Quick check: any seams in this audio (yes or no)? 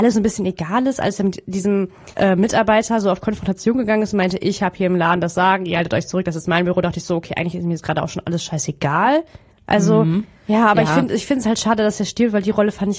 yes